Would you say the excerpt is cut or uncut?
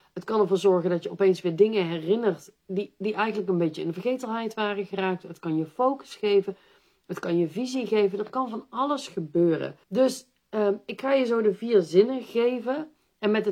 cut